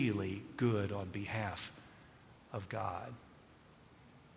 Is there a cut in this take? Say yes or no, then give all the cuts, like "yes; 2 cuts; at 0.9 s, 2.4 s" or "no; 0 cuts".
no; 0 cuts